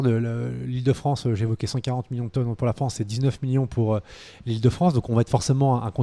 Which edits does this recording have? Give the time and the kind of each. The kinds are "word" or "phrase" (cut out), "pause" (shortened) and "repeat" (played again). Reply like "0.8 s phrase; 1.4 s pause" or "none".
none